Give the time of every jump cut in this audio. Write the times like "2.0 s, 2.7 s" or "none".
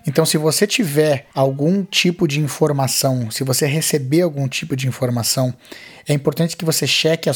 1.3 s